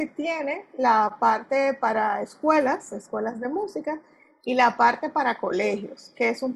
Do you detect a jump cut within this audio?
no; 0 cuts

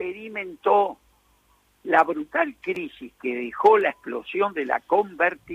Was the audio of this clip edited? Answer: no; 0 cuts

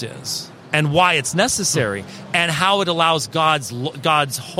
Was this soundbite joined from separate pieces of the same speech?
no; 0 cuts

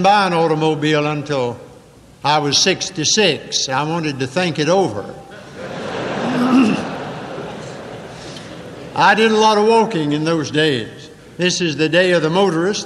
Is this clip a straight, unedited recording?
no; 1 cut; at 11.2 s

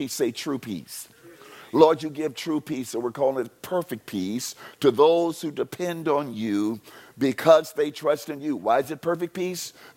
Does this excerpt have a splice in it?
no; 0 cuts

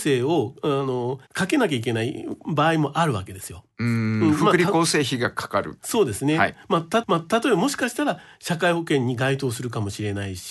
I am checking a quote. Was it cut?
yes; 2 cuts; at 1.3 s, 7.0 s

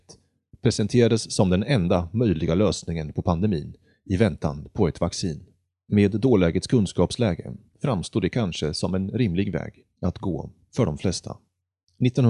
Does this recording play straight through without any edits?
yes; 0 cuts

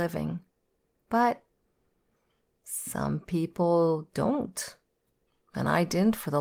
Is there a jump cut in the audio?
no; 0 cuts

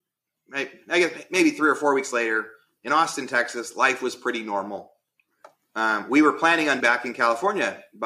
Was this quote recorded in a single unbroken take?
no; 1 cut; at 6.8 s

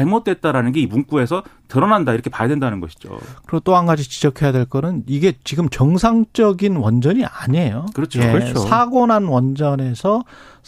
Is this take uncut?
yes; 0 cuts

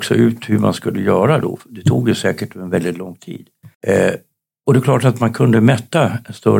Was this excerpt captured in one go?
no; 1 cut; at 3.7 s

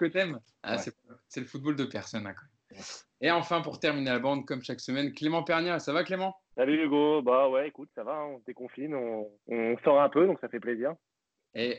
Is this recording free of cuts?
no; 2 cuts; at 6.5 s, 9.4 s

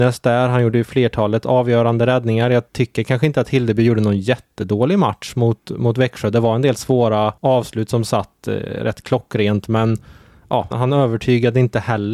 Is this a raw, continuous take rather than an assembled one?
no; 3 cuts; at 2.7 s, 7.4 s, 10.7 s

